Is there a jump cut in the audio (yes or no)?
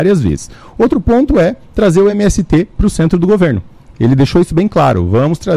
no